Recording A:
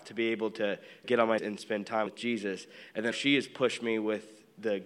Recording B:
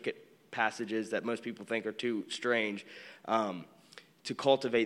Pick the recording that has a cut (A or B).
A